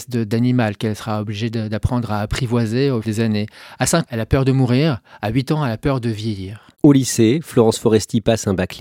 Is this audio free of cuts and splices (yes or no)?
no